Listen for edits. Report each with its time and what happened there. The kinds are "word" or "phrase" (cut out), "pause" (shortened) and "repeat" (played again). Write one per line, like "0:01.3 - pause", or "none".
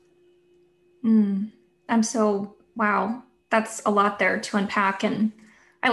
none